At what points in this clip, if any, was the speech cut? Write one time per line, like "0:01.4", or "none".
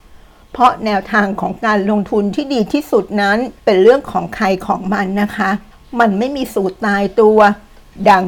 0:03.6
0:05.7